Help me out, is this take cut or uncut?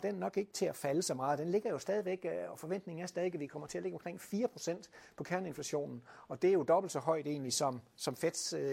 uncut